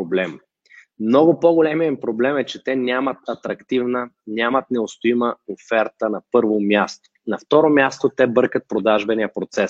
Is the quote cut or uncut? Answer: uncut